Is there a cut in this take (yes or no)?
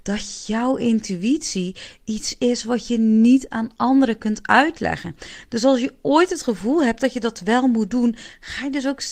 no